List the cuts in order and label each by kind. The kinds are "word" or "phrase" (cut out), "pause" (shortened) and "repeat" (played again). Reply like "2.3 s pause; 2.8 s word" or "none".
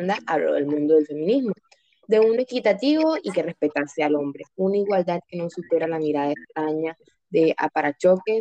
none